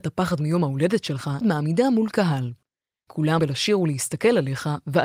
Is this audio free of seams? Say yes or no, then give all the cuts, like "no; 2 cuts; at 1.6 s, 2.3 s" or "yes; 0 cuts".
no; 2 cuts; at 1.4 s, 3.4 s